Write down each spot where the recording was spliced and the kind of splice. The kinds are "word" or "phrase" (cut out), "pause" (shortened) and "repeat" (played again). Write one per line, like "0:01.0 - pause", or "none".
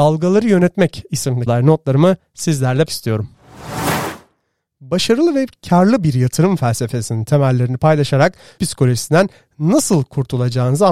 0:01.5 - word
0:02.9 - word
0:08.6 - word